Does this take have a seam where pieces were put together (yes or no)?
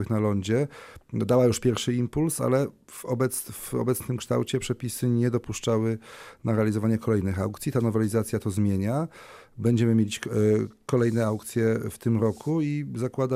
no